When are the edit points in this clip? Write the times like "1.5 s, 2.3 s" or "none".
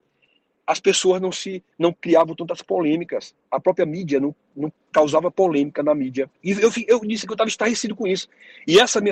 1.7 s, 3.4 s, 6.3 s